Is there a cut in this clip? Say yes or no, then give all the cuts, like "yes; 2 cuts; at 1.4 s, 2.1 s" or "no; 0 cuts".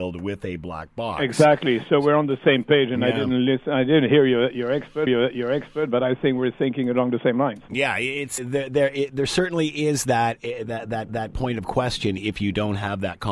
yes; 3 cuts; at 5.1 s, 8.4 s, 11.1 s